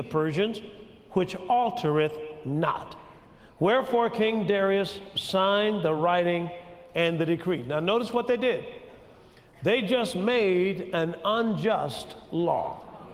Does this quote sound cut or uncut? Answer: uncut